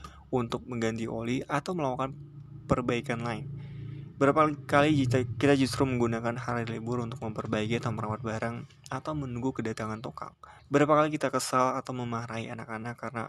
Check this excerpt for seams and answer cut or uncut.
cut